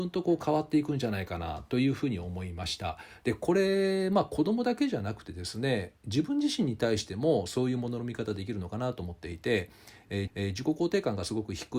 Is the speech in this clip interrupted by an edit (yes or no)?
yes